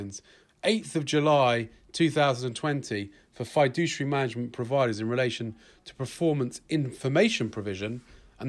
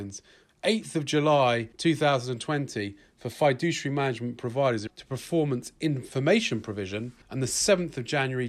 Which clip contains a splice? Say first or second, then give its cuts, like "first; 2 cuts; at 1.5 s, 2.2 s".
second; 3 cuts; at 1.7 s, 4.9 s, 7.2 s